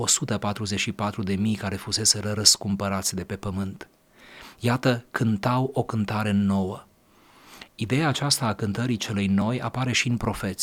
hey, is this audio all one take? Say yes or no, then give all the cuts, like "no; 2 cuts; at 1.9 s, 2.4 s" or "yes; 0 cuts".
no; 1 cut; at 7.7 s